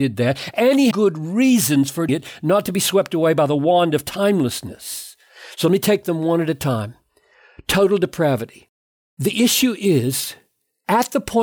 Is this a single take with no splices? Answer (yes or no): no